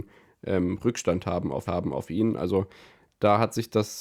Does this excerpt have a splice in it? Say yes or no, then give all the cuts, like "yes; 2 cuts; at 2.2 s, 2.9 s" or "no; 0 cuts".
yes; 1 cut; at 1.7 s